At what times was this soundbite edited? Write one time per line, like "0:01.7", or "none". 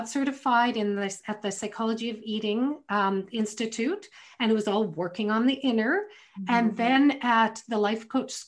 none